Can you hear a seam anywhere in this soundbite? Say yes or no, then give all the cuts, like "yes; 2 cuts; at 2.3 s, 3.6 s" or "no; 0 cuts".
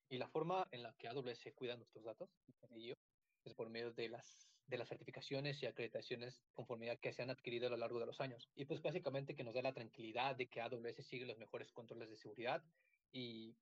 yes; 3 cuts; at 3.5 s, 6.5 s, 8.5 s